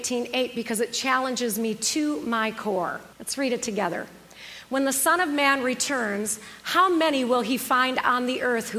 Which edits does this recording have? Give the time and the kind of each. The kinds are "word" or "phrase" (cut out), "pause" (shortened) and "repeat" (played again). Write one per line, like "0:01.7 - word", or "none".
0:03.1 - pause